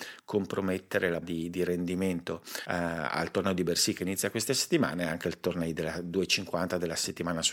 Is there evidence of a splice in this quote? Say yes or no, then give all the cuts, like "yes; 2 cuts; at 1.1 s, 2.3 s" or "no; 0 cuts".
yes; 1 cut; at 1.2 s